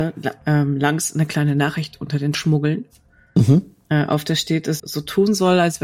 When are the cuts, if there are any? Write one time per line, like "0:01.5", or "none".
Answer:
0:02.3
0:04.8